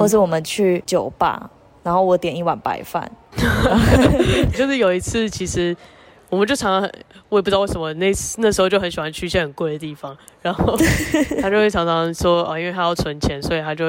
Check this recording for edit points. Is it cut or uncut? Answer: cut